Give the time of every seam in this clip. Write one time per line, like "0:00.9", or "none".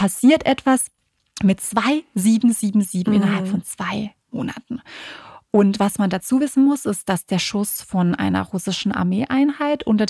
none